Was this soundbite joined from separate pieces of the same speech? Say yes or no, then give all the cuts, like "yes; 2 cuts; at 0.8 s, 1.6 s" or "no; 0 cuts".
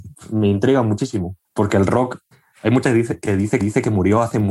yes; 4 cuts; at 1.4 s, 2.3 s, 2.8 s, 3.6 s